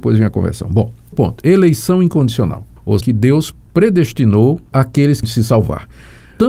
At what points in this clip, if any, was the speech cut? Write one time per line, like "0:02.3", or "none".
0:01.1
0:03.0
0:05.2